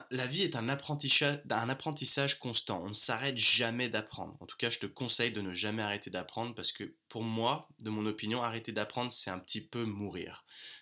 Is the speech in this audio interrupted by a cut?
no; 0 cuts

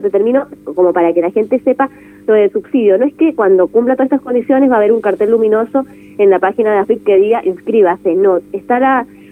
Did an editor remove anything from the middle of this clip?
no; 0 cuts

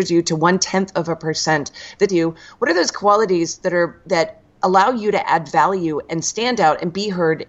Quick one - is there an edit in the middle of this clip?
yes; 1 cut; at 2.1 s

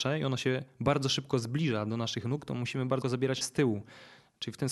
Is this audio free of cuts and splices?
no; 2 cuts; at 3.0 s, 3.4 s

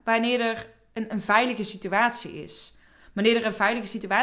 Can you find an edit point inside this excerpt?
no; 0 cuts

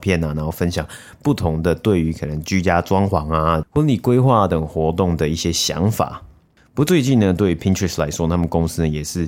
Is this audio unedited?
yes; 0 cuts

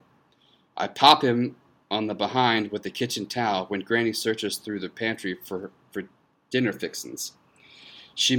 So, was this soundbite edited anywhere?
no; 0 cuts

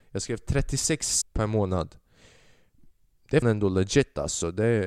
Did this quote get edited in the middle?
yes; 2 cuts; at 1.2 s, 3.4 s

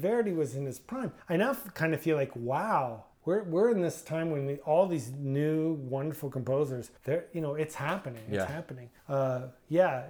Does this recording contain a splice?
yes; 4 cuts; at 1.2 s, 3.1 s, 7.0 s, 9.0 s

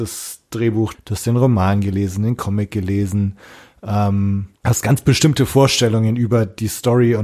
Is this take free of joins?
no; 2 cuts; at 0.9 s, 4.6 s

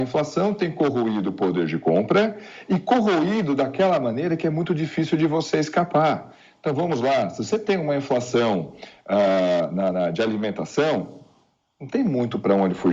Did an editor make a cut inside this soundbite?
no; 0 cuts

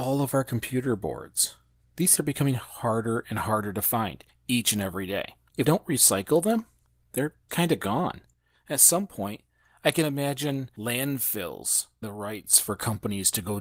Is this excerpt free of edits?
no; 4 cuts; at 2.2 s, 5.6 s, 7.5 s, 12.0 s

